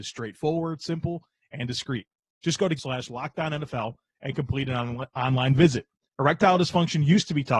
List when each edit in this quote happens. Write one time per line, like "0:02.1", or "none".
0:02.8